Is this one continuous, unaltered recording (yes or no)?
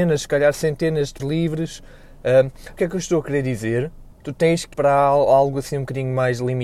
no